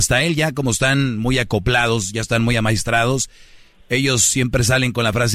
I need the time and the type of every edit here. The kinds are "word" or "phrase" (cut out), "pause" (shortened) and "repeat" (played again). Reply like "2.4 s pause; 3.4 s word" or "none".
none